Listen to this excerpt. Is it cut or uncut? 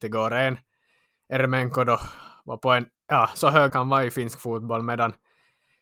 cut